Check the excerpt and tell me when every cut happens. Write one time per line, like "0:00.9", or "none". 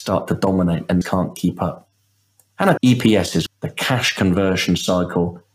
0:01.0
0:02.8
0:03.5